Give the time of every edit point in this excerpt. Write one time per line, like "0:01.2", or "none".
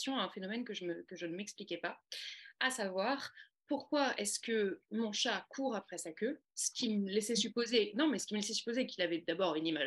none